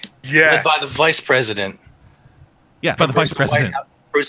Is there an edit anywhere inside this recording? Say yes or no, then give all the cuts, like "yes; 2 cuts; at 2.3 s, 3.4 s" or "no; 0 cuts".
yes; 1 cut; at 3.0 s